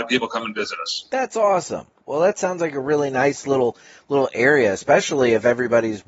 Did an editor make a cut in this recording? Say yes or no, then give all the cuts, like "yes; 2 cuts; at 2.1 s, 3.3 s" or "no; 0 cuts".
no; 0 cuts